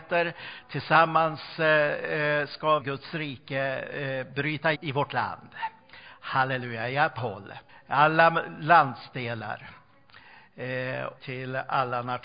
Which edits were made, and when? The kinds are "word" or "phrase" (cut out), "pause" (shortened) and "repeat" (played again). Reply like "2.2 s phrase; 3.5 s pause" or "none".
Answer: 2.8 s phrase; 4.7 s word; 7.2 s word; 7.7 s pause; 11.2 s word